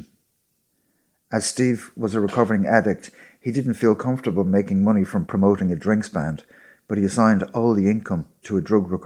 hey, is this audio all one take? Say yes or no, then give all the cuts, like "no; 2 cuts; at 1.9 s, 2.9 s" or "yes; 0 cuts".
yes; 0 cuts